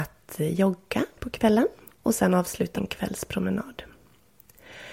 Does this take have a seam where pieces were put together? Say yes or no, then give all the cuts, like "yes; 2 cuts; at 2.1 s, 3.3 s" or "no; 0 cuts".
yes; 2 cuts; at 1.2 s, 2.8 s